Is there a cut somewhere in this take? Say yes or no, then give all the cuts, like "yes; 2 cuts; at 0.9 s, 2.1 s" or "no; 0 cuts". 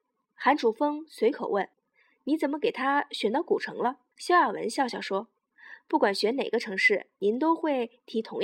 yes; 2 cuts; at 1.7 s, 4.1 s